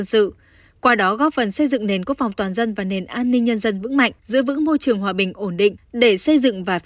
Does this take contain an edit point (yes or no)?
yes